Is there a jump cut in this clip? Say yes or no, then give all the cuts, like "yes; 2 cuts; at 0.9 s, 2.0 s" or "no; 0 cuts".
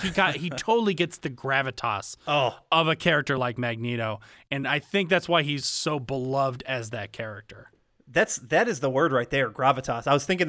no; 0 cuts